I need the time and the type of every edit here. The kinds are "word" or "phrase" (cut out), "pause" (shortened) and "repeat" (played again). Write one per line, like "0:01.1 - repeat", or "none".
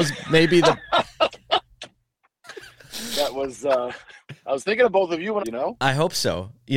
0:04.4 - pause
0:05.4 - phrase